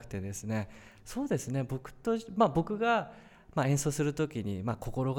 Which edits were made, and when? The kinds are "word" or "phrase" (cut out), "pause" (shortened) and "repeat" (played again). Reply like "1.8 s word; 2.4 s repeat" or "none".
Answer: none